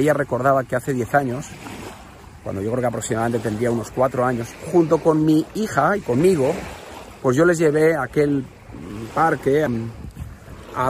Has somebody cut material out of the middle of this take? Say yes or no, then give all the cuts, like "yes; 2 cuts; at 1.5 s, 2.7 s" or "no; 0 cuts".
yes; 1 cut; at 9.7 s